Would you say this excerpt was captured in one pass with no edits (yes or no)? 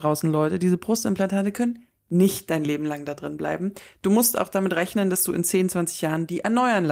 yes